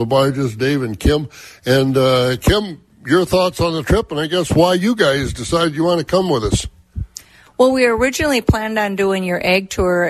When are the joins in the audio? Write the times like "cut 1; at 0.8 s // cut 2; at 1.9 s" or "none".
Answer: none